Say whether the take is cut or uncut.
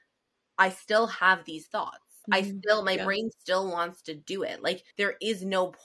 cut